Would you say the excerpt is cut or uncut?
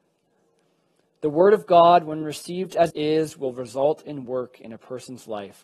cut